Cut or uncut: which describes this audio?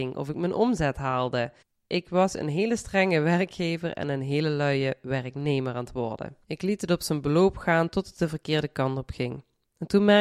cut